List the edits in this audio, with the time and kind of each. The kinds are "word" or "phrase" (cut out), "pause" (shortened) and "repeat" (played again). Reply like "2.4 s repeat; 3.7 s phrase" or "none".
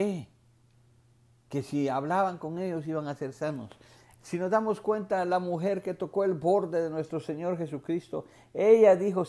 none